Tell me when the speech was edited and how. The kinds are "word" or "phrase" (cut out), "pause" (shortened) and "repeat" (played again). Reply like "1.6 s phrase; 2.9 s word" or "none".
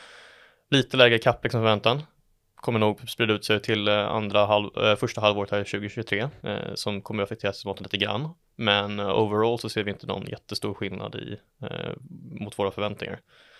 6.4 s pause

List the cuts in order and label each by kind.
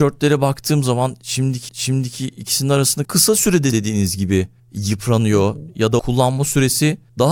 1.7 s repeat; 3.0 s phrase; 3.7 s word; 6.0 s word

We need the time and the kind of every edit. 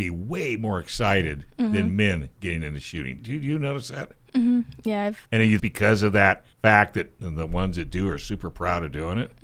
3.2 s word; 5.3 s pause; 5.6 s phrase; 6.5 s pause; 7.2 s phrase

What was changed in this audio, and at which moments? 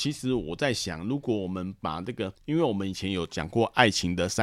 2.3 s pause

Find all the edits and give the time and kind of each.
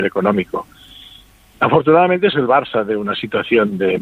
2.3 s word

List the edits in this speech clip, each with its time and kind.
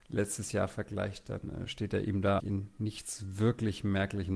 2.4 s word

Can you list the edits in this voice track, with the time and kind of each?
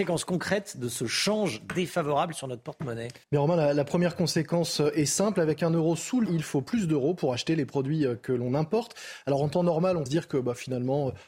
3.2 s pause; 6.3 s word; 10.1 s word

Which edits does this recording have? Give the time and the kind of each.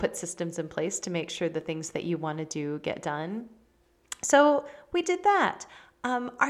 none

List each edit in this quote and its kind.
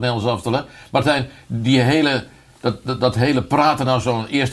none

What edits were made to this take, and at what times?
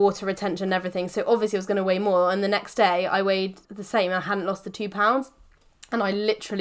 3.6 s pause

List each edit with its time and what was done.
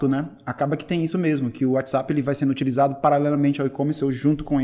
none

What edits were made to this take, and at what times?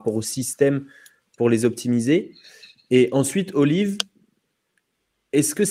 none

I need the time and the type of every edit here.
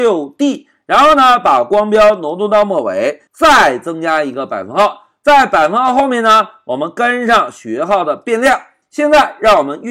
3.3 s pause

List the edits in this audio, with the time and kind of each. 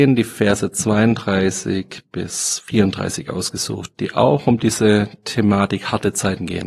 none

